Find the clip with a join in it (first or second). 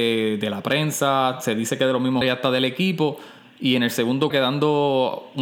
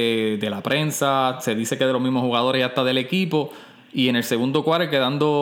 first